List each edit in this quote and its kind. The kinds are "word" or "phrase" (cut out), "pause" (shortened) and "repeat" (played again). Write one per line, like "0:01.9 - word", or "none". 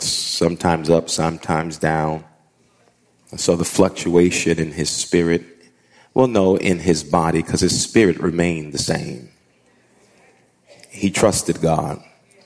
none